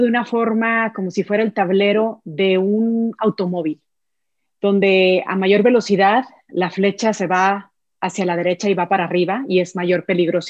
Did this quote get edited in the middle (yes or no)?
no